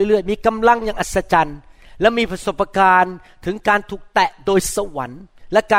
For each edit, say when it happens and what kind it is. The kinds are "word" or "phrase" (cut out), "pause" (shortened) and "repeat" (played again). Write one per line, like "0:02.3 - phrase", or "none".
none